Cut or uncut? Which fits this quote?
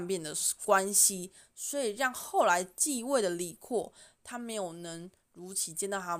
uncut